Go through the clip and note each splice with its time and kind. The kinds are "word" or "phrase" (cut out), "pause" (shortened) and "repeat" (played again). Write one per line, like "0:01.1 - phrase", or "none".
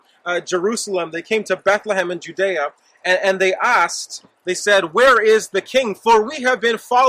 none